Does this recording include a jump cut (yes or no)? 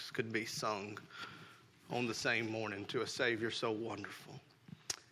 no